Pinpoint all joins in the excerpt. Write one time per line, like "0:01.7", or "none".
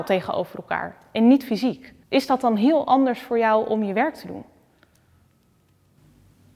0:02.0